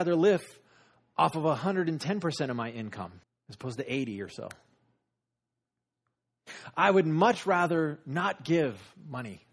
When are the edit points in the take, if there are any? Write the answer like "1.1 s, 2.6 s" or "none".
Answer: 3.2 s